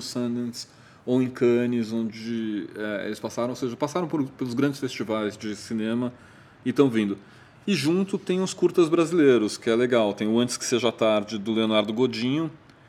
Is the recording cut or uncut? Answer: uncut